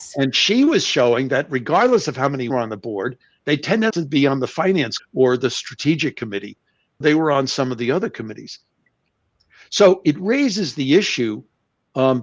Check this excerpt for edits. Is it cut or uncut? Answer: cut